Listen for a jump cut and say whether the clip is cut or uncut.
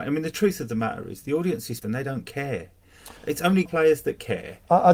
cut